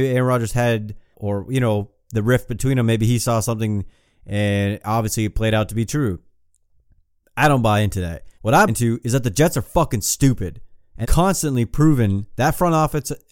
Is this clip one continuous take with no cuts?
no; 4 cuts; at 1.1 s, 8.4 s, 8.7 s, 11.0 s

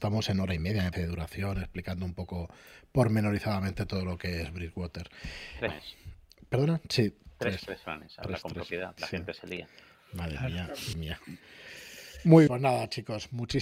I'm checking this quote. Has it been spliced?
yes; 6 cuts; at 0.9 s, 5.7 s, 7.6 s, 9.0 s, 10.9 s, 12.5 s

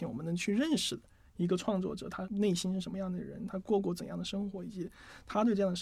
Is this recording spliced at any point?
no; 0 cuts

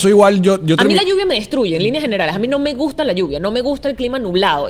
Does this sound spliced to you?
no; 0 cuts

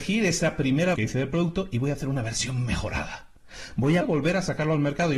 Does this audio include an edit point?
yes; 2 cuts; at 1.0 s, 4.0 s

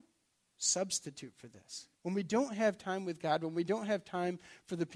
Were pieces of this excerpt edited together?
yes; 1 cut; at 1.9 s

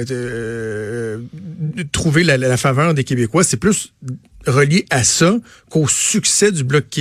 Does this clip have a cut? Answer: no; 0 cuts

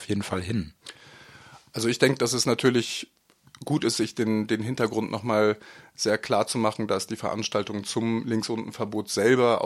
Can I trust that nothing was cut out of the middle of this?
yes; 0 cuts

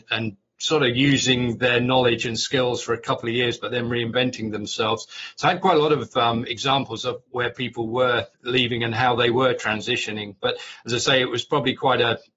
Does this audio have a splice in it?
yes; 2 cuts; at 7.3 s, 8.3 s

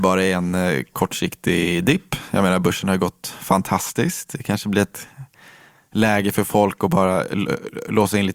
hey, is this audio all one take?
yes; 0 cuts

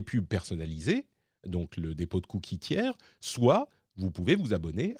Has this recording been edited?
no; 0 cuts

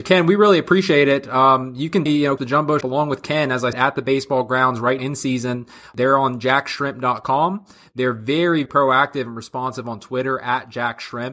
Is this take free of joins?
no; 6 cuts; at 2.1 s, 2.4 s, 2.8 s, 3.7 s, 5.0 s, 8.7 s

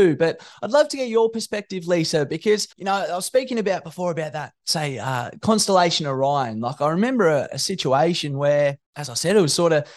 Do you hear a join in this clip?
yes; 2 cuts; at 2.7 s, 8.8 s

